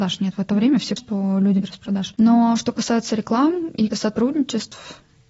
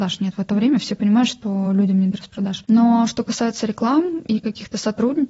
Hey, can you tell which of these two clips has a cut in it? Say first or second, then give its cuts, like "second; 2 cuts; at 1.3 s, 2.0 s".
first; 3 cuts; at 1.0 s, 1.6 s, 3.9 s